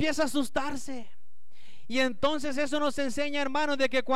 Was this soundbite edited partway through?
no; 0 cuts

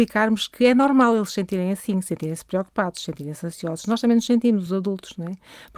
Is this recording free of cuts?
yes; 0 cuts

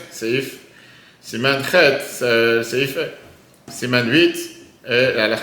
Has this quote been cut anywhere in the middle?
no; 0 cuts

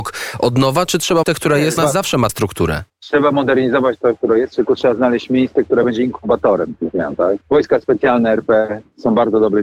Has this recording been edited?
yes; 5 cuts; at 1.2 s, 1.8 s, 2.3 s, 2.9 s, 7.4 s

